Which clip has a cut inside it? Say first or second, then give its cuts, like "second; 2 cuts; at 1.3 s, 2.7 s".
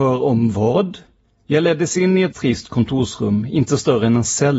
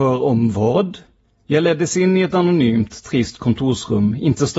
first; 1 cut; at 2.3 s